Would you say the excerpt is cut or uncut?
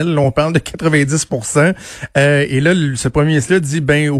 uncut